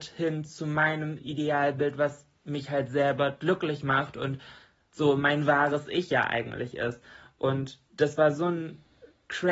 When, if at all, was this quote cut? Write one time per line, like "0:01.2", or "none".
0:07.9